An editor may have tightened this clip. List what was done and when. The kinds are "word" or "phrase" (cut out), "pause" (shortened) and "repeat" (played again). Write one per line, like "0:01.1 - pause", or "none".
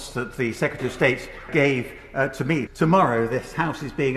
0:01.5 - word
0:02.7 - word